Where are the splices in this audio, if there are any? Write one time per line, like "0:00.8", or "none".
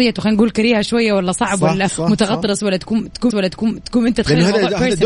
0:01.9
0:03.3